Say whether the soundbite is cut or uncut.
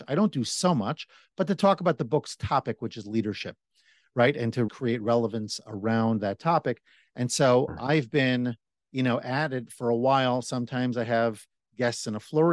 cut